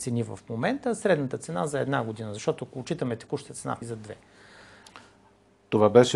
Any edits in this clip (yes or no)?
yes